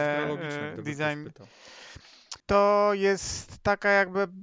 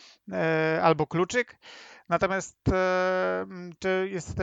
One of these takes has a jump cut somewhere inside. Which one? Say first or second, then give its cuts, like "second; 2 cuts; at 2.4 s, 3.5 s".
first; 1 cut; at 2.4 s